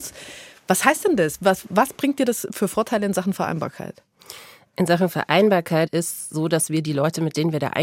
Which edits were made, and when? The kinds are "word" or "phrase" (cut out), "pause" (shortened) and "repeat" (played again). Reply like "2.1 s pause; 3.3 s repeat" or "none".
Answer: none